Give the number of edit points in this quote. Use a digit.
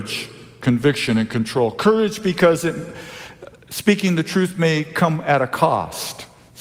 0